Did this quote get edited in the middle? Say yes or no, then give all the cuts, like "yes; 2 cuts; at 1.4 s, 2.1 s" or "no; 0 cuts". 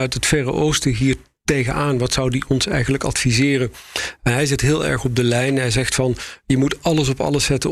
no; 0 cuts